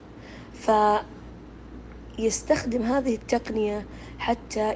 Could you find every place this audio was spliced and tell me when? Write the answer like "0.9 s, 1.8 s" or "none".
none